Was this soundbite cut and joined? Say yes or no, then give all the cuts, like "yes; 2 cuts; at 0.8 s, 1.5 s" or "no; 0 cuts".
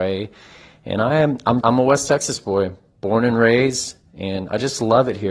yes; 1 cut; at 1.6 s